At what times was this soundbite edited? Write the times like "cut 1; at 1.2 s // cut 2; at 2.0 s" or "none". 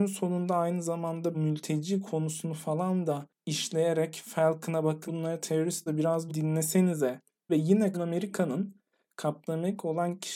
cut 1; at 1.3 s // cut 2; at 5.1 s // cut 3; at 5.9 s // cut 4; at 6.3 s // cut 5; at 7.5 s // cut 6; at 7.9 s